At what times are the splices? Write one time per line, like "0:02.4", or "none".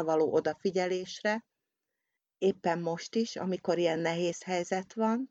none